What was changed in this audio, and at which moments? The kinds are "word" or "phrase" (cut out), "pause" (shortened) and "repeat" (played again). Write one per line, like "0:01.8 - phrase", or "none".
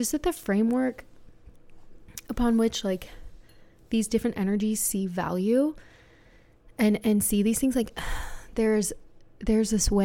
none